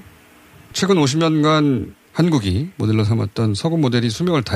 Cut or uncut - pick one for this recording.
uncut